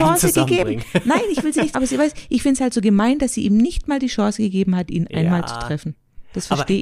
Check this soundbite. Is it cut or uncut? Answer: cut